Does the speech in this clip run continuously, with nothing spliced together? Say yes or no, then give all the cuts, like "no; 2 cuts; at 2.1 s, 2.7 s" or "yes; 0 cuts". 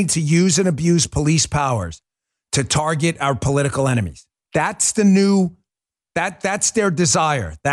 yes; 0 cuts